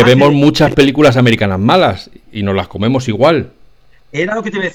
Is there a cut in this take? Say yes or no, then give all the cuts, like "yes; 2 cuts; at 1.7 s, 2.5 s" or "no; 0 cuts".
no; 0 cuts